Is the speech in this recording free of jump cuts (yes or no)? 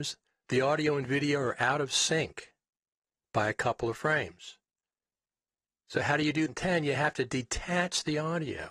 no